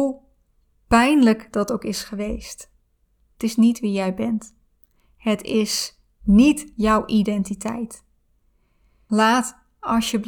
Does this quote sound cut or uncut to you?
uncut